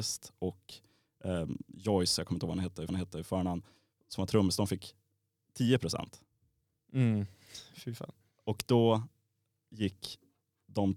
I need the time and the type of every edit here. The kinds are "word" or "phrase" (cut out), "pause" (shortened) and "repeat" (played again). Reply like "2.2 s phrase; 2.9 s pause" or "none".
2.9 s repeat